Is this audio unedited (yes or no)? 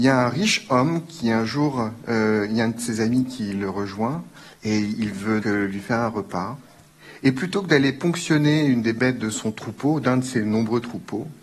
no